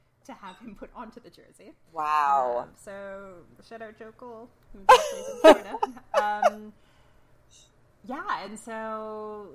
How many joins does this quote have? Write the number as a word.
zero